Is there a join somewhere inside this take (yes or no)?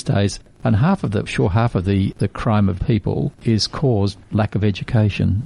yes